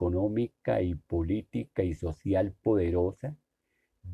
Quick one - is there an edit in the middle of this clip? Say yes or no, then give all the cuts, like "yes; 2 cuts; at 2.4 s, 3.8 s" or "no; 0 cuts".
no; 0 cuts